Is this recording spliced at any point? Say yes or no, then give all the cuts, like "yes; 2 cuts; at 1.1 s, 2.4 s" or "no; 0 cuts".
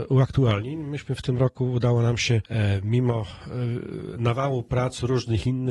no; 0 cuts